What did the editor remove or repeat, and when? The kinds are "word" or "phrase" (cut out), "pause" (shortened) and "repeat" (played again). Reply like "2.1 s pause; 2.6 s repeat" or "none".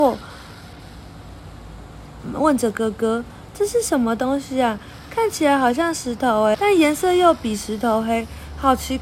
6.5 s word